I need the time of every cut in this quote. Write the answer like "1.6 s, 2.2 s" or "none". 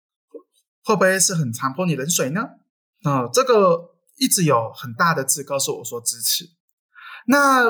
2.7 s